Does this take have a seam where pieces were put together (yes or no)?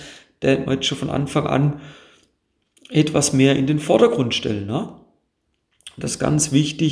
no